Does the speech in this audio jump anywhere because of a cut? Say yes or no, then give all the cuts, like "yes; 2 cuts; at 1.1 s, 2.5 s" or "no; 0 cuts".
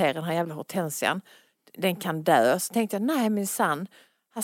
no; 0 cuts